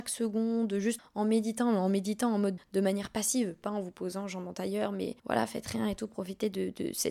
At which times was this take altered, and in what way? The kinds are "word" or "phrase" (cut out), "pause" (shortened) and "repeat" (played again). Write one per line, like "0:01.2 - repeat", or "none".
0:01.0 - word
0:02.6 - word
0:05.2 - pause